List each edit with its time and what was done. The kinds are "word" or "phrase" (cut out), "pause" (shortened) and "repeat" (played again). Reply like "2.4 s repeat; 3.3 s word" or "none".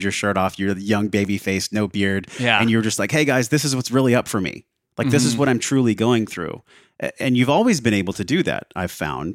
none

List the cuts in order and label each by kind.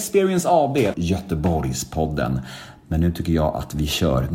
0.9 s phrase

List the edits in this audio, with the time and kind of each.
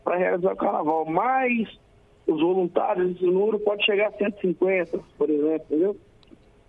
none

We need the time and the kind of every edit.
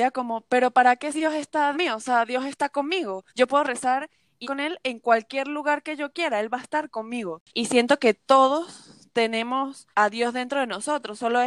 1.1 s word; 1.7 s word; 3.3 s pause; 4.4 s word; 7.5 s pause; 9.9 s pause

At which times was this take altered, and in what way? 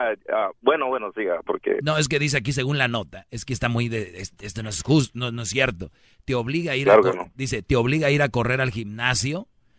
none

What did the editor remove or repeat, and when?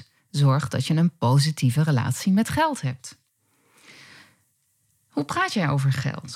none

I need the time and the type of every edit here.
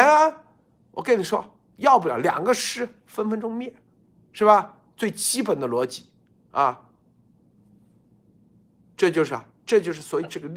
none

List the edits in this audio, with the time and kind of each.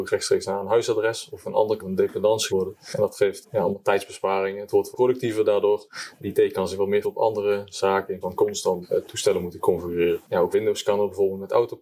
1.4 s word; 1.8 s word; 2.5 s word; 3.4 s word; 4.9 s word; 7.0 s word; 8.2 s word; 8.8 s word; 10.5 s word

